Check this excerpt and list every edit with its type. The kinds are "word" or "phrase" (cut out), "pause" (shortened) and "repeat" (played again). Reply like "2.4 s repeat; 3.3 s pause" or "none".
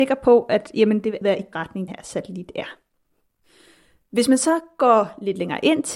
1.2 s word; 1.5 s word; 1.9 s word